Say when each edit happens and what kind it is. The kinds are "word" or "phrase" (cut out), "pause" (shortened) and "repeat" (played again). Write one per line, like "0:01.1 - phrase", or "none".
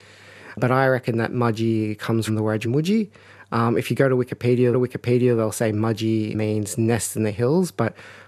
0:02.3 - word
0:02.6 - word
0:04.7 - repeat